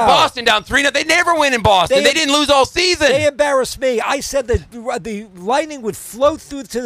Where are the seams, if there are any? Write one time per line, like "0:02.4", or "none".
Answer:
none